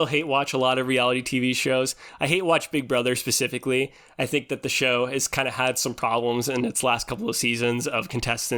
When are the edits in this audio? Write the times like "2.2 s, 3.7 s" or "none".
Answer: none